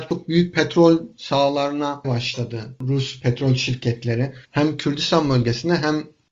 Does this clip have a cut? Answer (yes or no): yes